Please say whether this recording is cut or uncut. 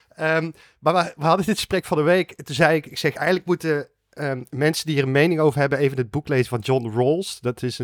uncut